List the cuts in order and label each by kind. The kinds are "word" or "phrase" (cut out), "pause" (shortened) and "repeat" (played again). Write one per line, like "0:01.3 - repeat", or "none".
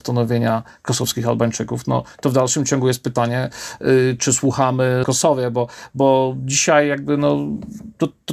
0:04.2 - word
0:05.0 - phrase